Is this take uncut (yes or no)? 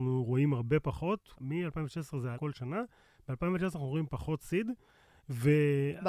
no